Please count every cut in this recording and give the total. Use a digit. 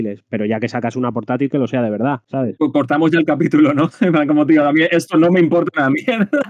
0